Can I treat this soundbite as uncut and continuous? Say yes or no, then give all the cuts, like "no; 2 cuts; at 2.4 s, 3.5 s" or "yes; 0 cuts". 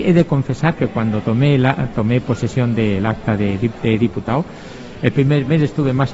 yes; 0 cuts